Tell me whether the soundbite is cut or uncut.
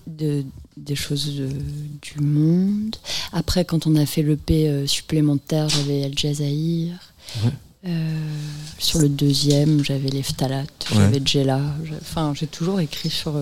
cut